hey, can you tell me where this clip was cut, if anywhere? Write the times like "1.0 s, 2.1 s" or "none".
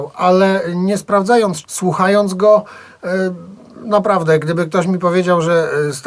1.6 s